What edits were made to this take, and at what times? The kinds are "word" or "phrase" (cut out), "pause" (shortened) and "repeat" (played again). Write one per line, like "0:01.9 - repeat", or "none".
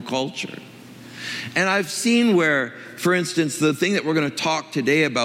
none